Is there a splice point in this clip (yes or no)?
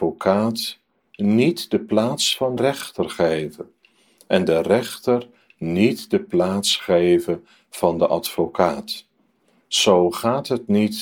yes